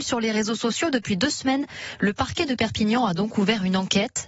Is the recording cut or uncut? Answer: uncut